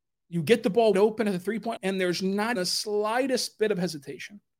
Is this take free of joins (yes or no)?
no